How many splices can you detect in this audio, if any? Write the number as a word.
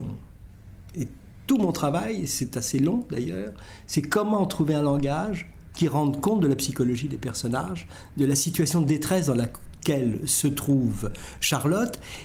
zero